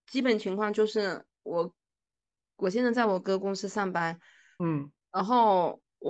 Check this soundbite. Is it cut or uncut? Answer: uncut